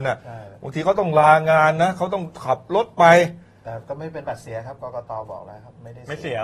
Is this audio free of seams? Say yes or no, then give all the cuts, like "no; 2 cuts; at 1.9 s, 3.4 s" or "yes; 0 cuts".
yes; 0 cuts